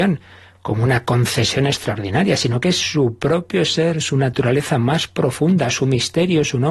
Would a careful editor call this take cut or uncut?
uncut